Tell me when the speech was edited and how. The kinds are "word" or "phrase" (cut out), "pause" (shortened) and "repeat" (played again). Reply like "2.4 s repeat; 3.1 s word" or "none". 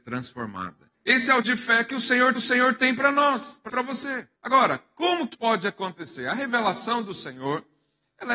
0.9 s pause; 1.4 s word; 2.4 s repeat; 3.7 s phrase; 4.4 s pause; 5.3 s word